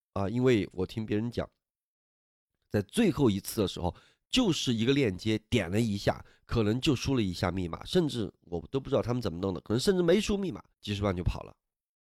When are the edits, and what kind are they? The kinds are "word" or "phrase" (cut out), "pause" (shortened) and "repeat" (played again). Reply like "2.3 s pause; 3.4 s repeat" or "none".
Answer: 10.7 s pause